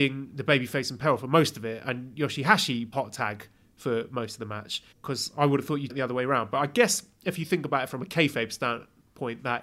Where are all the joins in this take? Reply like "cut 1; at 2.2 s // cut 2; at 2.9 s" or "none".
cut 1; at 2.9 s // cut 2; at 4.9 s // cut 3; at 5.9 s